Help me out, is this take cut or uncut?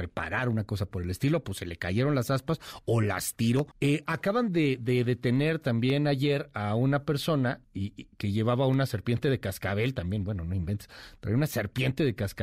cut